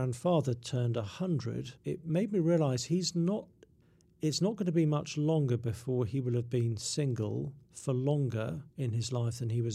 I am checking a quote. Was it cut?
yes; 4 cuts; at 1.8 s, 3.8 s, 7.6 s, 8.7 s

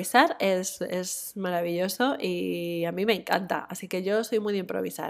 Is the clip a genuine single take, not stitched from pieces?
yes; 0 cuts

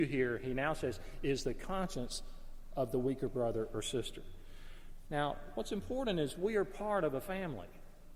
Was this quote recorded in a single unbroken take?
yes; 0 cuts

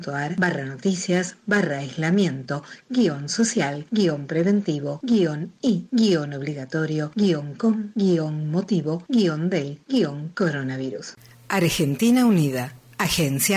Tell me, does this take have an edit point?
no; 0 cuts

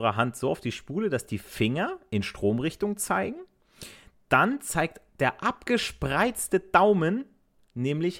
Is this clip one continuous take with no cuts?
yes; 0 cuts

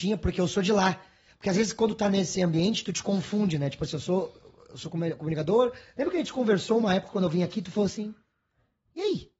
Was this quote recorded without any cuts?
yes; 0 cuts

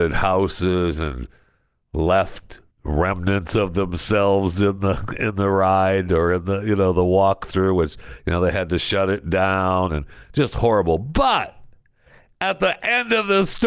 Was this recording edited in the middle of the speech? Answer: yes; 1 cut; at 2.7 s

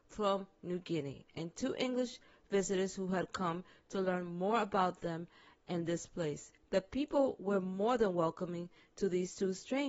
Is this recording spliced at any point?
no; 0 cuts

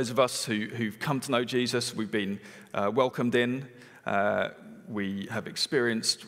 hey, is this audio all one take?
yes; 0 cuts

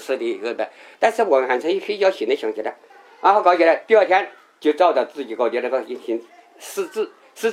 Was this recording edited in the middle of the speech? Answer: no; 0 cuts

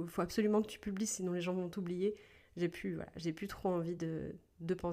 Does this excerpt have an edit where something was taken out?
no; 0 cuts

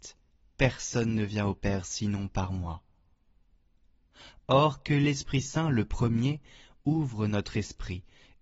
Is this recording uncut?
yes; 0 cuts

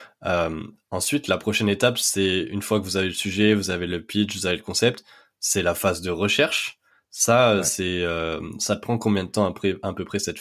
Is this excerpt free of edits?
yes; 0 cuts

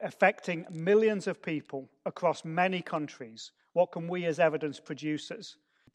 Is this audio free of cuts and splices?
yes; 0 cuts

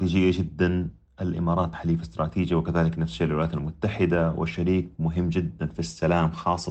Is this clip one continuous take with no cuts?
no; 1 cut; at 1.7 s

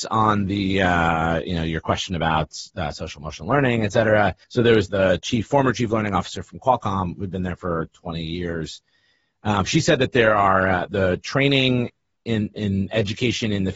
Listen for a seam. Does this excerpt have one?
yes; 3 cuts; at 4.4 s, 4.9 s, 10.9 s

